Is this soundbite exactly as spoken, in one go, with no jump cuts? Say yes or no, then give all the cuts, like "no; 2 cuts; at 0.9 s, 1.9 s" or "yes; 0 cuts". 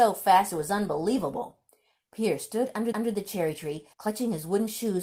no; 2 cuts; at 2.9 s, 3.9 s